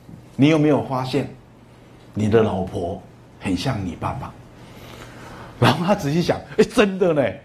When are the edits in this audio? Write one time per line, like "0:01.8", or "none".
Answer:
none

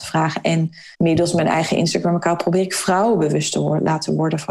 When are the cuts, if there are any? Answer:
0:00.9

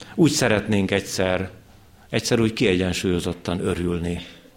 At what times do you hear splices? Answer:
none

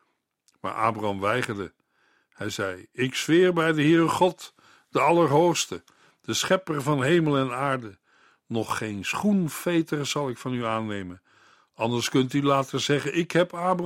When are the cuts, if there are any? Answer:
none

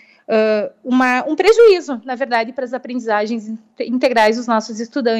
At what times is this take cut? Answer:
none

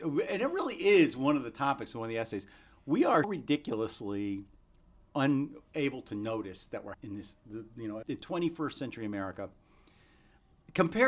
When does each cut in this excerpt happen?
0:03.2
0:06.9
0:08.0

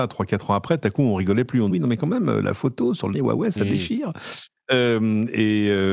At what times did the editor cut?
0:01.7
0:03.1

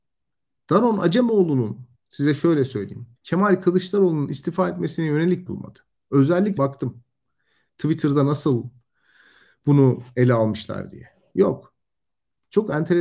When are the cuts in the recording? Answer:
0:01.9
0:03.2
0:05.5
0:06.6

